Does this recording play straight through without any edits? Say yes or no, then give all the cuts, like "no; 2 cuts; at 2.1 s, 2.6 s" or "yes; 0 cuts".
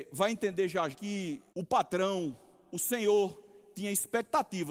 no; 2 cuts; at 0.9 s, 1.5 s